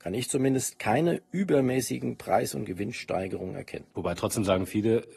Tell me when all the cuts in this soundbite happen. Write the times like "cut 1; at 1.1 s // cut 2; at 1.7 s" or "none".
cut 1; at 3.9 s